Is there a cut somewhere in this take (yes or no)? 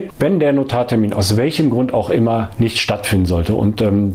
no